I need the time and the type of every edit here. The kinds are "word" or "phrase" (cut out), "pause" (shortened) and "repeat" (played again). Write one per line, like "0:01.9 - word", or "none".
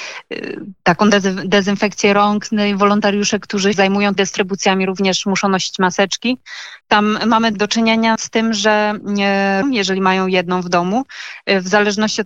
0:03.7 - word
0:04.2 - word
0:06.8 - pause
0:07.5 - word
0:08.2 - word
0:09.6 - phrase